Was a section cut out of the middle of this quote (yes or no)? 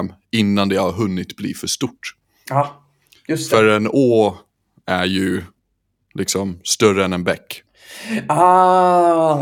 no